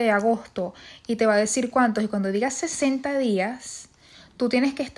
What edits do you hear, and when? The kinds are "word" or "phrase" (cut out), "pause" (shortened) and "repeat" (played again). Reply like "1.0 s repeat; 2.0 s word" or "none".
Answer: none